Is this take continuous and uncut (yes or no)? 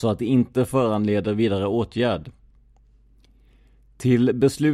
yes